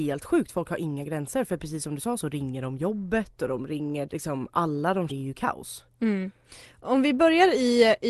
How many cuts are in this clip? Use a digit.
2